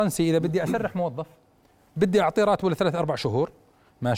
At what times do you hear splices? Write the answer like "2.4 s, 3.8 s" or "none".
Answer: none